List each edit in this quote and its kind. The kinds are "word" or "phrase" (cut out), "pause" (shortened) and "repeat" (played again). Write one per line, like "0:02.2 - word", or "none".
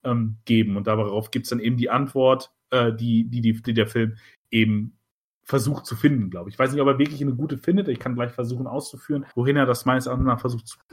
0:09.3 - pause